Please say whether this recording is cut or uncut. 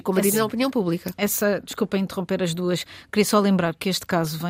uncut